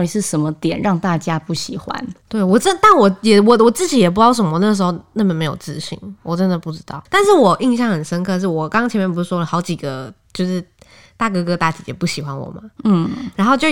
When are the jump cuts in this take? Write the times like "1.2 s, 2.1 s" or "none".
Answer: 2.2 s, 7.1 s

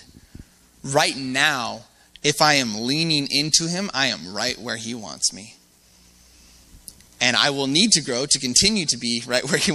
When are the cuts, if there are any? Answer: none

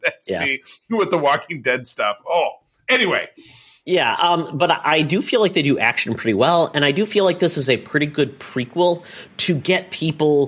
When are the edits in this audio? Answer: none

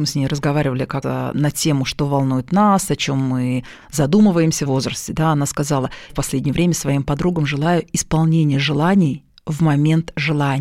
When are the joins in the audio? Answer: 1.0 s, 4.7 s, 6.1 s

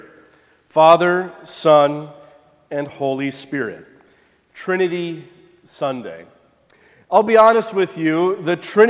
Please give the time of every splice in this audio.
none

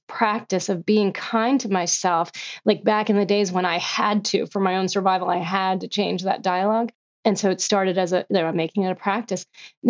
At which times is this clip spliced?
none

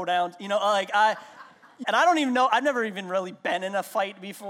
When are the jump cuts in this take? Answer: 1.8 s

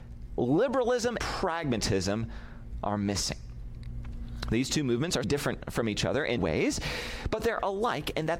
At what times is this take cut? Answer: 1.2 s, 5.2 s, 6.4 s

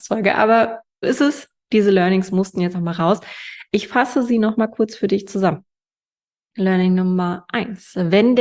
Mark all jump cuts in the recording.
1.0 s, 2.7 s

